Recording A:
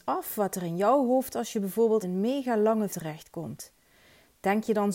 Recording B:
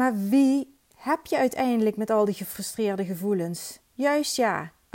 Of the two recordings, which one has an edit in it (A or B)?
A